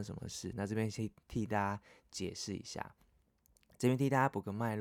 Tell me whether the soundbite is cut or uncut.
uncut